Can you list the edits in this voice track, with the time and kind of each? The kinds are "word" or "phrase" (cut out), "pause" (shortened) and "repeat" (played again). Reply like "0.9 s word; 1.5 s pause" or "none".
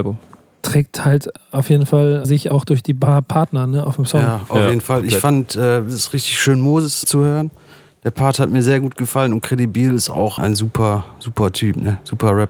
2.2 s word; 7.0 s word; 10.4 s word